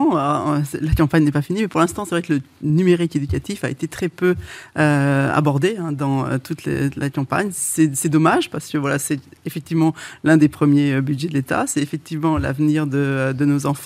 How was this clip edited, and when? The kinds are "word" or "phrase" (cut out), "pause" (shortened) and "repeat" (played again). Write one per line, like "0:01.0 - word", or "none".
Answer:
none